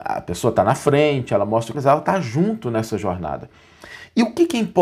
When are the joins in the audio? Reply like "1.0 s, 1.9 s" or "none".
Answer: 1.7 s